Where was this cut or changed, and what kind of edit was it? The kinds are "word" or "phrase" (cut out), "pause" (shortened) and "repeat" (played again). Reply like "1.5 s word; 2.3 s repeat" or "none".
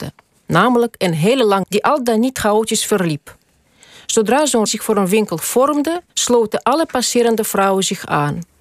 1.6 s word; 4.7 s word; 6.1 s pause